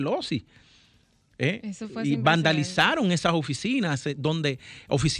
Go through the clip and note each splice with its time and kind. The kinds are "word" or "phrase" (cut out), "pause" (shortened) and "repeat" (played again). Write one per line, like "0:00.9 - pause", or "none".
none